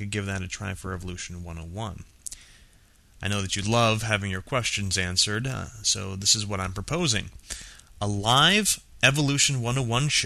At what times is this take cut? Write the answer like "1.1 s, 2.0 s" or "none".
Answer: none

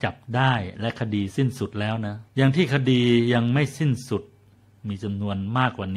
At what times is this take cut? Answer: 2.3 s

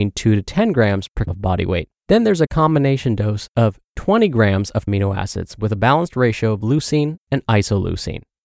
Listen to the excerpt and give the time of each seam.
1.3 s, 2.0 s, 4.9 s

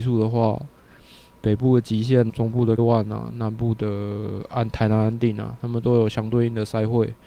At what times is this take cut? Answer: 2.3 s, 2.8 s

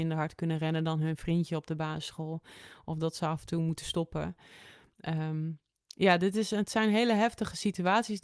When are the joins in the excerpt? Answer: none

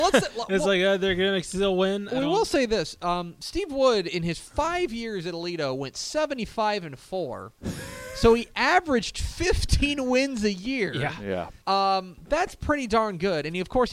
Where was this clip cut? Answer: 11.6 s

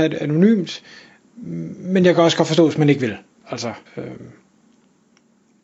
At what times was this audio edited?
3.9 s

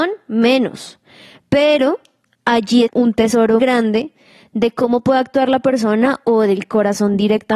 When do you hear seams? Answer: 2.9 s, 3.6 s

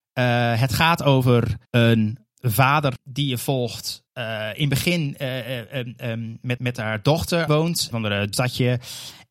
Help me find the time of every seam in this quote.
1.7 s, 3.0 s, 4.1 s, 6.6 s, 7.5 s, 7.9 s, 8.3 s

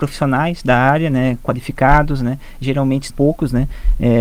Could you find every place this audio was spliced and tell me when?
3.1 s

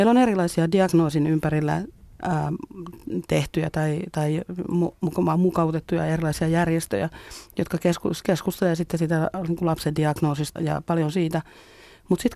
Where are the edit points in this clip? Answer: 10.6 s

